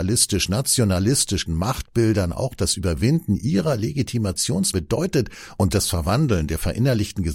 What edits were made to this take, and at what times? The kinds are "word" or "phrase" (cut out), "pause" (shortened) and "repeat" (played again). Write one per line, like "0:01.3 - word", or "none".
0:01.5 - word
0:04.7 - word
0:05.7 - word